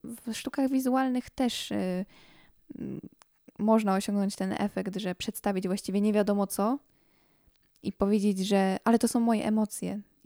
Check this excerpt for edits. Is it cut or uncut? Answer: uncut